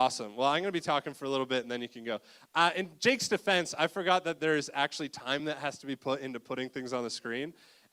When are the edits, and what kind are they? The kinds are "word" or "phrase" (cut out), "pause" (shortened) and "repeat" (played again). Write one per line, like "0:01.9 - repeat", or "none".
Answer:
none